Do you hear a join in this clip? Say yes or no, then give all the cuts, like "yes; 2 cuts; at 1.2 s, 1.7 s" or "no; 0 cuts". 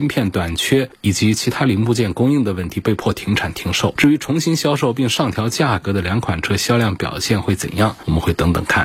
no; 0 cuts